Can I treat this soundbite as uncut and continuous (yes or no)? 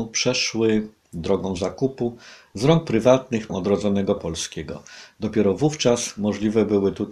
no